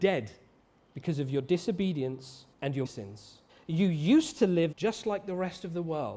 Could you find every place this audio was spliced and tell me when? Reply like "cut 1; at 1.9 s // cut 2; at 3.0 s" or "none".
cut 1; at 2.5 s // cut 2; at 2.9 s // cut 3; at 3.5 s // cut 4; at 4.7 s